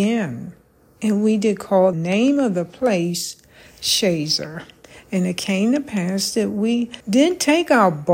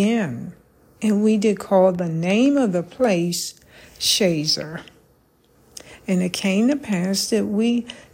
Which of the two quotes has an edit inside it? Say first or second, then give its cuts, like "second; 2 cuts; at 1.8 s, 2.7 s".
first; 3 cuts; at 1.9 s, 4.8 s, 7.0 s